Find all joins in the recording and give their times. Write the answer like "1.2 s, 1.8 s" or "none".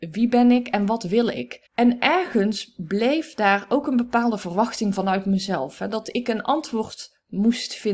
1.7 s